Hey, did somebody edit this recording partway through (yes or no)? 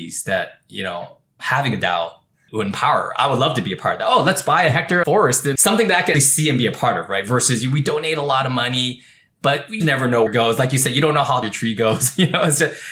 yes